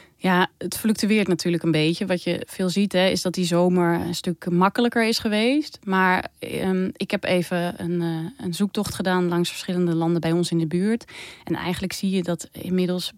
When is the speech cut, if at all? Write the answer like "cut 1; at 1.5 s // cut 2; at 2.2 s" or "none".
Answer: none